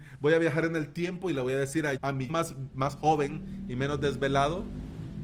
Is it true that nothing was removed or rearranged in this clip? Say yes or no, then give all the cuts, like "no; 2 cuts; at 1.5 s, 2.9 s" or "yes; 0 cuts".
no; 2 cuts; at 2.0 s, 2.3 s